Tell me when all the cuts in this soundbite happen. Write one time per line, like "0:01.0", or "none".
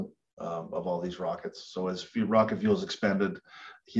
none